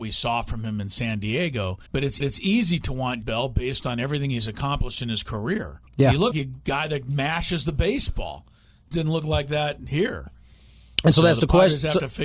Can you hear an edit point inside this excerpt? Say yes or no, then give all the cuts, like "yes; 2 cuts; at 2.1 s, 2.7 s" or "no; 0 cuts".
yes; 6 cuts; at 1.9 s, 2.2 s, 3.2 s, 5.9 s, 6.3 s, 8.9 s